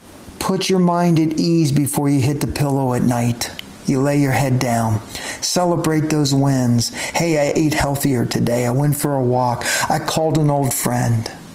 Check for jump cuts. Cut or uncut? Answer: uncut